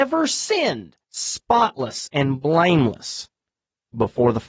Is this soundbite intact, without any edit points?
no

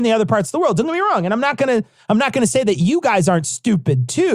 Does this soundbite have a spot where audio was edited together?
no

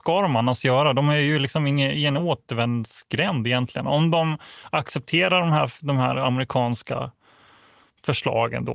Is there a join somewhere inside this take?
no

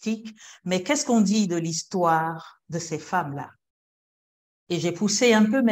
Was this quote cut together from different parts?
no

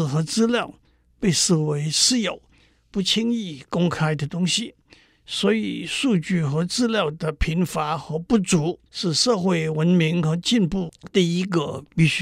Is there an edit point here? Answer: yes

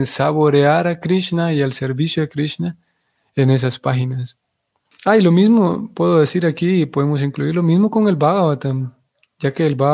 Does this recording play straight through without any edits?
yes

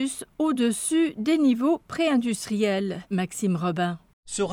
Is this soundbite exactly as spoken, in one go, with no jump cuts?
yes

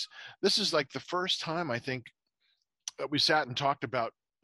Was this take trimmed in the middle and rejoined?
no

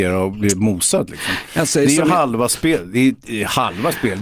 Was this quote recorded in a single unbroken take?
yes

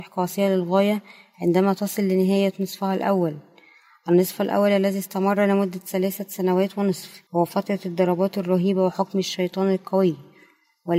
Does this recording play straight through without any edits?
no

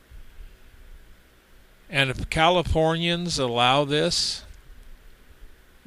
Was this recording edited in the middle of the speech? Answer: no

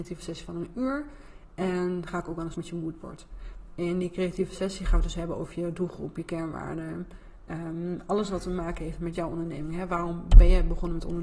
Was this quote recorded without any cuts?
no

